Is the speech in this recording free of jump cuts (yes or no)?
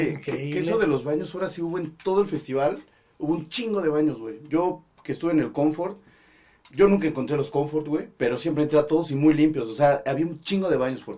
yes